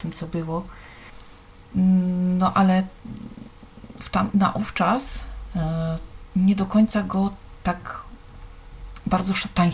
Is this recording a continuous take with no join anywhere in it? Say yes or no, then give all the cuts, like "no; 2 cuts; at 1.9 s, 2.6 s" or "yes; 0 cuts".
yes; 0 cuts